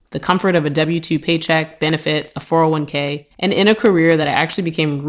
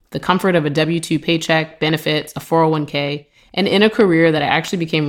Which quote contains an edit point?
first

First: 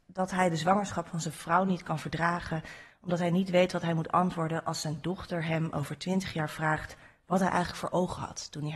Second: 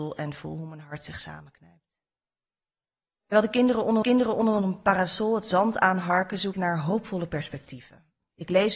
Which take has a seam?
second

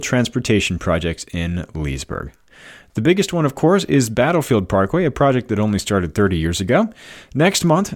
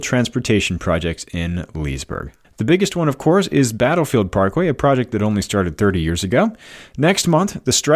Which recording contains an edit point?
second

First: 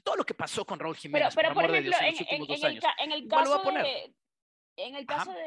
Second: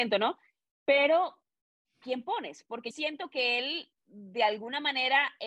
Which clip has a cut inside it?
second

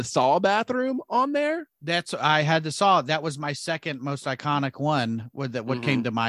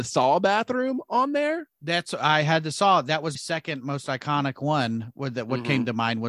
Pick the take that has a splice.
second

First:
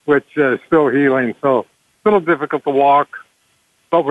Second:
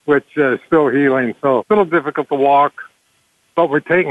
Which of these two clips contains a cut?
second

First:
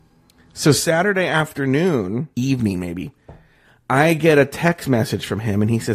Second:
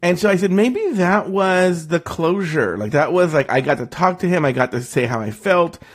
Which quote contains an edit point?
first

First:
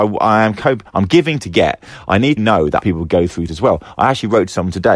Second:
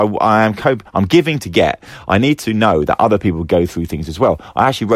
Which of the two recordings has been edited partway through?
first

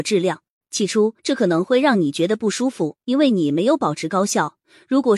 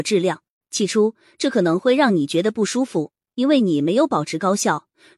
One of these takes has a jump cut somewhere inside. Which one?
first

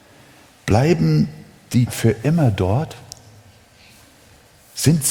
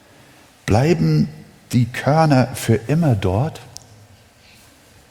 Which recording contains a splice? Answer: first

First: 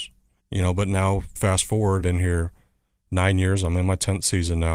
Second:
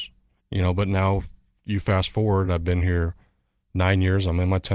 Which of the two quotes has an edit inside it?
first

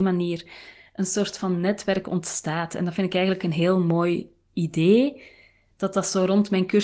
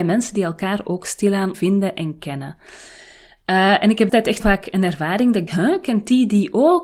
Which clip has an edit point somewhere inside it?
second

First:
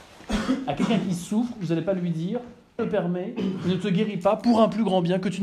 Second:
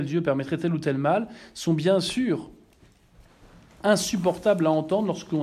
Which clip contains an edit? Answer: first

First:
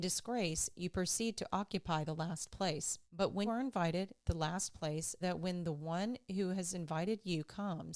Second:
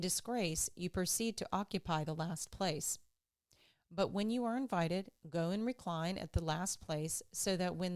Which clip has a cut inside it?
first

